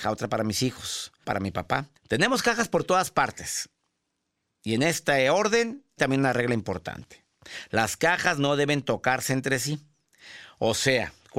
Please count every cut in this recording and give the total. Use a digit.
3